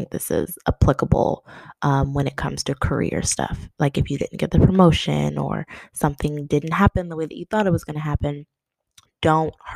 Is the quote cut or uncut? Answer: uncut